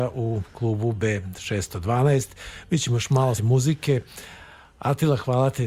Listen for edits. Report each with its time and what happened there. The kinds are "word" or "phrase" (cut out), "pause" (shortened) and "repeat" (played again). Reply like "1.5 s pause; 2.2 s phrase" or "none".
3.4 s word